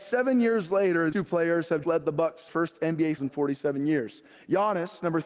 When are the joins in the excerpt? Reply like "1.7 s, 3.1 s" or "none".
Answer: 1.1 s, 1.8 s, 2.5 s, 3.2 s